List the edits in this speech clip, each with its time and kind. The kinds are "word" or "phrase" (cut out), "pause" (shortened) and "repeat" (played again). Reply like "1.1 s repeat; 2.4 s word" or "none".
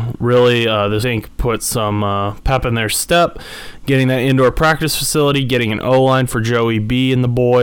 1.0 s phrase